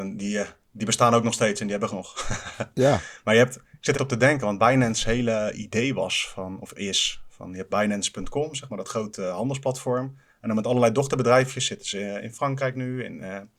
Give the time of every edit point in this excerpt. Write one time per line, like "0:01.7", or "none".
0:01.9
0:03.9